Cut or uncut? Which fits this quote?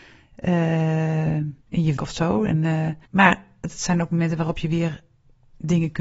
cut